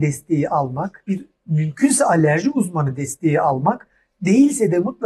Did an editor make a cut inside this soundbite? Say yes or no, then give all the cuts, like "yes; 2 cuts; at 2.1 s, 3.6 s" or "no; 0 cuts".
no; 0 cuts